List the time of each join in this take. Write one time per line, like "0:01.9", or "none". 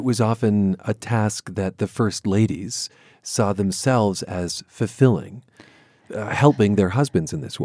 none